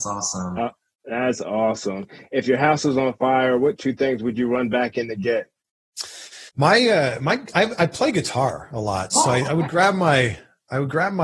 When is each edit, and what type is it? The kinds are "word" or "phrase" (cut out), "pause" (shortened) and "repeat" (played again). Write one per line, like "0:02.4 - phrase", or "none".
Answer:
0:06.5 - pause